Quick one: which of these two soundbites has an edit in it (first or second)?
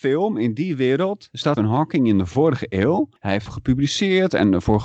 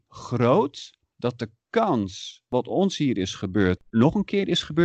first